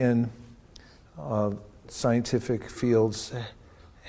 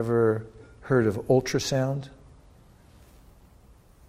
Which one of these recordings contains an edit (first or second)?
first